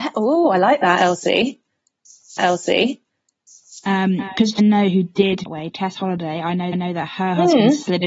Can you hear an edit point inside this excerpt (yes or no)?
yes